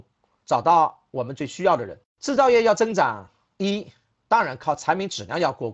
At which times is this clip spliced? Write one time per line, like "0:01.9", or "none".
0:02.1